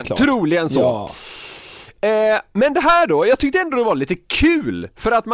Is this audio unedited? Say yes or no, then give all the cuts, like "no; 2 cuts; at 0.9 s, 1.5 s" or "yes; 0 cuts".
no; 1 cut; at 2.0 s